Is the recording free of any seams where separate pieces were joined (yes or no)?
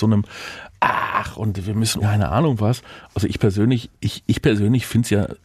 no